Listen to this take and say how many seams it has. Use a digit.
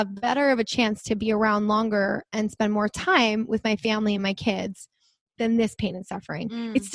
0